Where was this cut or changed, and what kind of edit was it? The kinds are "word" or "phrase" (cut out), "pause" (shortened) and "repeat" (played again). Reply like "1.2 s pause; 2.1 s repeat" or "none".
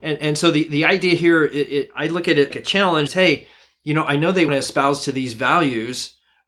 2.5 s word; 3.1 s word; 4.5 s word